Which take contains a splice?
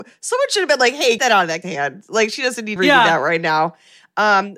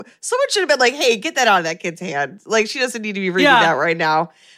first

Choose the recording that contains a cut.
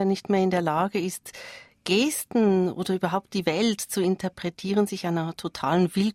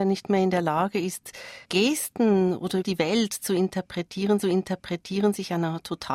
second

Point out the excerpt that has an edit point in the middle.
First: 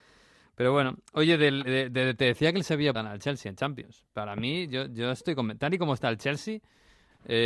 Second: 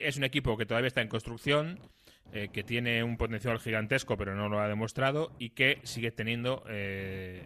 first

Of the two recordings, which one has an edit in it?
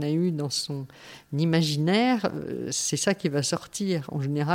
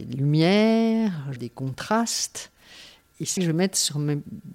second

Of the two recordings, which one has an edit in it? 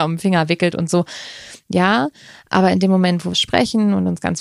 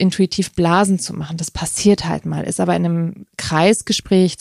first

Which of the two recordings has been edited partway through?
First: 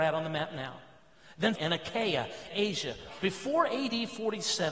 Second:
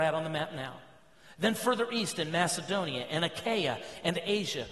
first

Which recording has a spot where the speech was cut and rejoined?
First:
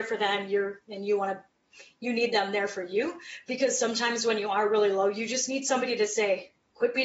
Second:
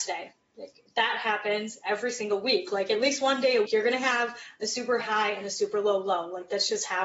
second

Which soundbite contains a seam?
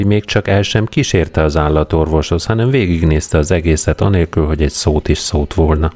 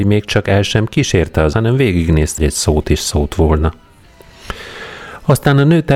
second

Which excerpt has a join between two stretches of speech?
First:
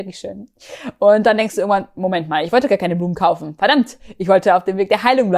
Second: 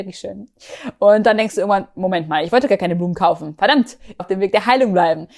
second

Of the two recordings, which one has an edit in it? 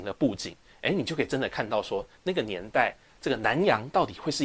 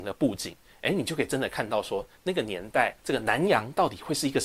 second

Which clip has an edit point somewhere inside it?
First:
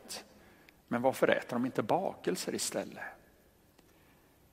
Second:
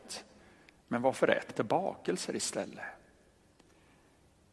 second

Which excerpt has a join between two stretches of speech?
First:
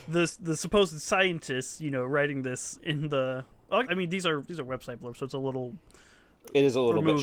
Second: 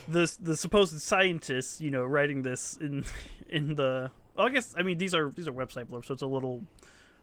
first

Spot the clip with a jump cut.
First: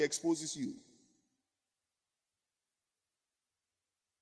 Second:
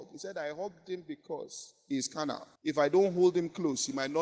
second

